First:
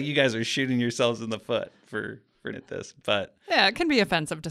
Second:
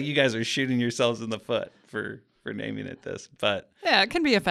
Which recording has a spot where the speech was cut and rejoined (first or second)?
first